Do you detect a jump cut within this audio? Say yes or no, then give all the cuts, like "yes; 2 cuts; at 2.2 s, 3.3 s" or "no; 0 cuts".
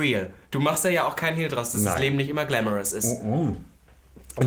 no; 0 cuts